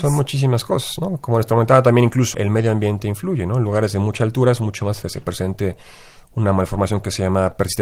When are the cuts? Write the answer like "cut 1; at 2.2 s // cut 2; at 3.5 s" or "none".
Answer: cut 1; at 2.3 s // cut 2; at 5.0 s